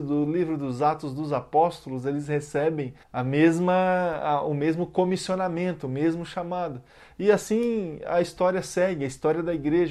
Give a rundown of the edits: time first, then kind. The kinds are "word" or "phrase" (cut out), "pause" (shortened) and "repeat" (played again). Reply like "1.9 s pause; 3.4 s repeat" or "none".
3.0 s pause